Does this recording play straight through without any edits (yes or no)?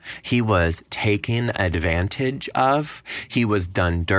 yes